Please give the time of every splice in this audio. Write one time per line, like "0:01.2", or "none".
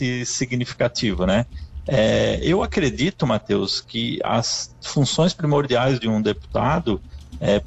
none